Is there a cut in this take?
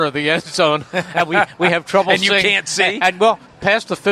no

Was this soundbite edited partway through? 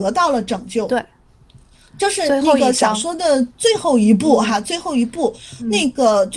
no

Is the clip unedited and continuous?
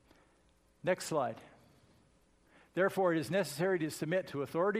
yes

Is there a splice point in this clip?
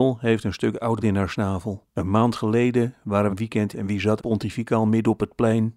yes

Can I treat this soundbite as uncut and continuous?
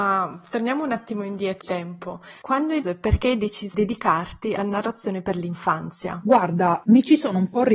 no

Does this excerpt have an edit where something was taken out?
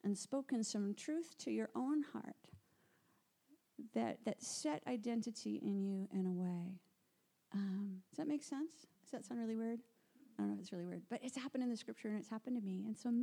yes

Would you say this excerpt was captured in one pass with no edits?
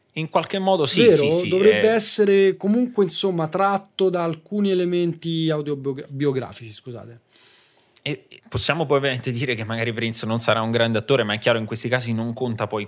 no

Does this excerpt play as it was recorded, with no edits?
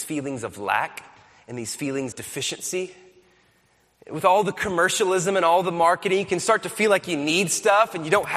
no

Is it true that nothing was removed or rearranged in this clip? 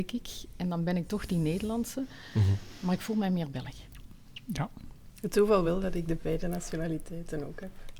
yes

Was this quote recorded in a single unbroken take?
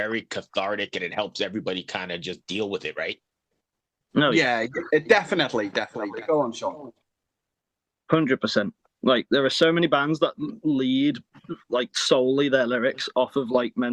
yes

